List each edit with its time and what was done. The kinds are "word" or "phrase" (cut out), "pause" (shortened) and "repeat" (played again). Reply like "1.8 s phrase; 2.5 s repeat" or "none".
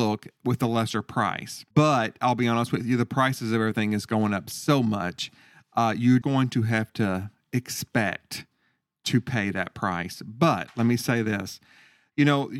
1.7 s pause; 6.2 s word